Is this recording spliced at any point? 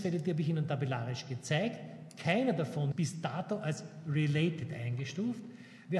yes; 1 cut; at 2.9 s

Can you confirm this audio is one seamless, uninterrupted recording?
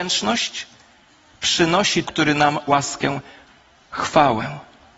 no; 2 cuts; at 2.0 s, 2.7 s

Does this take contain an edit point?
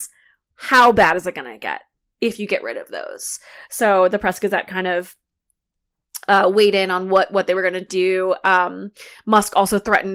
no; 0 cuts

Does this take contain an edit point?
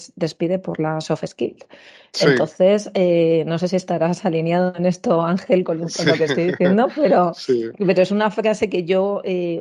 no; 0 cuts

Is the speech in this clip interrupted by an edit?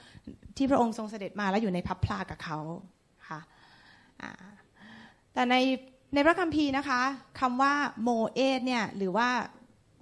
no; 0 cuts

